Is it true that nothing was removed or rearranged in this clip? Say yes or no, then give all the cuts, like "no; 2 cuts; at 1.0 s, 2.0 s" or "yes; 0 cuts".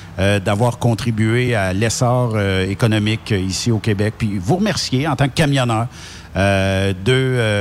yes; 0 cuts